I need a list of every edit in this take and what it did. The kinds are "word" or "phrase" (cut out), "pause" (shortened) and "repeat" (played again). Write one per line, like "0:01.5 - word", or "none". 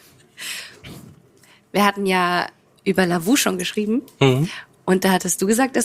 none